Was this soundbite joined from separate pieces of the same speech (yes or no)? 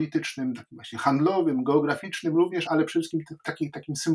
yes